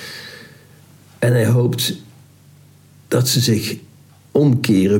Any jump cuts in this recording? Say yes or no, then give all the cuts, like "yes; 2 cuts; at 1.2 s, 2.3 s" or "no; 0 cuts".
no; 0 cuts